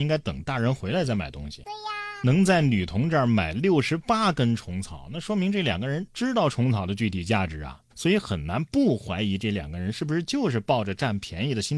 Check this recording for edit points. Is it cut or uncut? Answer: cut